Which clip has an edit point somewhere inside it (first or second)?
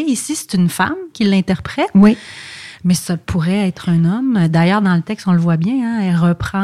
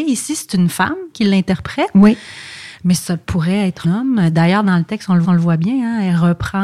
second